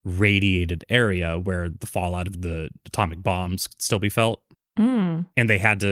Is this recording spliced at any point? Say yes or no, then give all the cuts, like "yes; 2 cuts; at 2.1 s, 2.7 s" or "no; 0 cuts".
no; 0 cuts